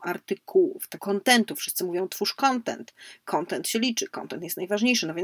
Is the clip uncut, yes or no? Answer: no